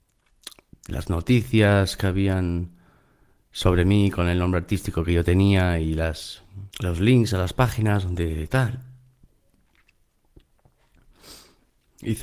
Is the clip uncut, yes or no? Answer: no